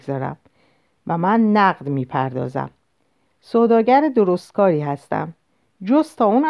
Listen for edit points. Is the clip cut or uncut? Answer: uncut